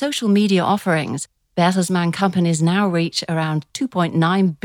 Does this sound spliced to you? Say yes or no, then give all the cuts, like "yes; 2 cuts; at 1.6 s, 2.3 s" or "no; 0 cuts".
no; 0 cuts